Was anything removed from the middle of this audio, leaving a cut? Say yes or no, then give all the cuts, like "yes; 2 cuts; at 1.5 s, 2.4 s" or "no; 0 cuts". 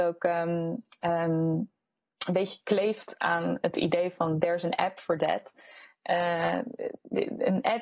no; 0 cuts